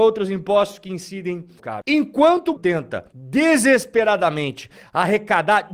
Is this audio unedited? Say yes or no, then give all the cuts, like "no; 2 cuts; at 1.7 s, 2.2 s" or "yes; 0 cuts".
no; 3 cuts; at 1.6 s, 2.6 s, 3.1 s